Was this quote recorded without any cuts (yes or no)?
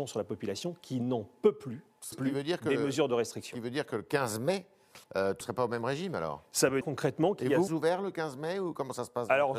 no